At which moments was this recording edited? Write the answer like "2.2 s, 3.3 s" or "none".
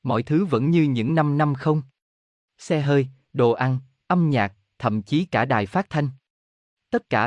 none

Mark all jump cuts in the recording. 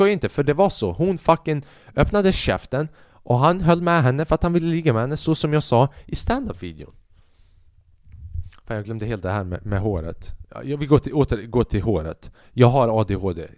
none

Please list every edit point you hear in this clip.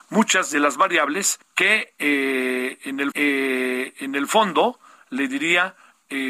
1.4 s, 3.1 s

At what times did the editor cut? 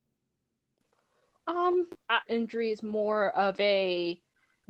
2.3 s

